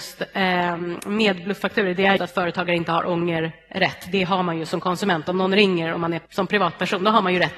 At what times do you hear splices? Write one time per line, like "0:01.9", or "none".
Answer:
0:02.2
0:06.3